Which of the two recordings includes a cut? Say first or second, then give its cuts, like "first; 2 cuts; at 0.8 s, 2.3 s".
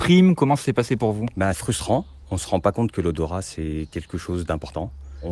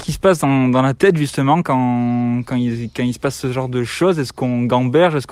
first; 1 cut; at 1.5 s